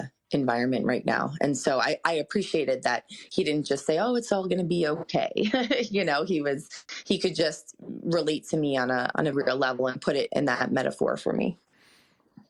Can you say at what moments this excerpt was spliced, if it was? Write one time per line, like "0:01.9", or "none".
0:09.3